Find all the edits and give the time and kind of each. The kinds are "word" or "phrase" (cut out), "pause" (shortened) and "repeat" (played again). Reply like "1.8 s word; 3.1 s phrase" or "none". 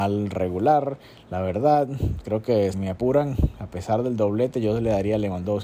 2.7 s word